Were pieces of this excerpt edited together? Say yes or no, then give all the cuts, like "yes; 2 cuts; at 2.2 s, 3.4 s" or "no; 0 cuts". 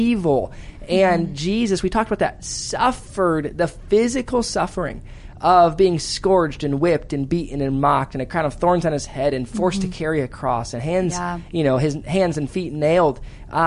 no; 0 cuts